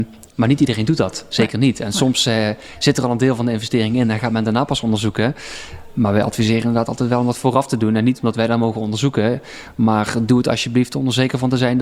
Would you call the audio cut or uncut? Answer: uncut